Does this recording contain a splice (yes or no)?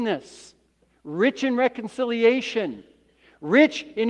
no